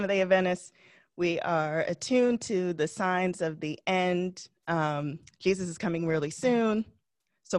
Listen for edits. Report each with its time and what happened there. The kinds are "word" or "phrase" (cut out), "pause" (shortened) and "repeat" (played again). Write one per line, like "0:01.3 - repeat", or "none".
none